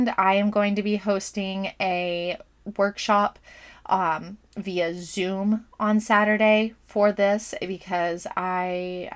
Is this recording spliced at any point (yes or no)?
no